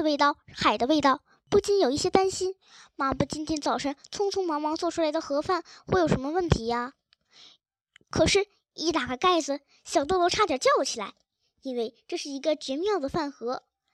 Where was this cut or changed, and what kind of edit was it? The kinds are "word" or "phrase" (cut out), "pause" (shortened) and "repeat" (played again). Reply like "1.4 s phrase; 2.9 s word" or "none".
none